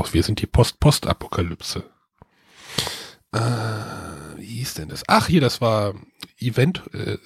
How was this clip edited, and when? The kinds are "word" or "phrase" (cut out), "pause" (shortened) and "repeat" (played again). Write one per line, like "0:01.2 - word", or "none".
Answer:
none